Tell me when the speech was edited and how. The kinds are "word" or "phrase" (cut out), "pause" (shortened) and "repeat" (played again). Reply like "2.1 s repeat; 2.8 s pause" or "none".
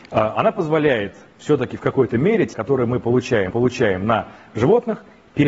2.5 s word; 3.5 s repeat